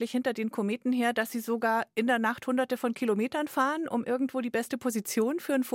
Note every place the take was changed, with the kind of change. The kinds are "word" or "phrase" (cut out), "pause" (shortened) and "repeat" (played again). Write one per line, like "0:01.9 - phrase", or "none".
none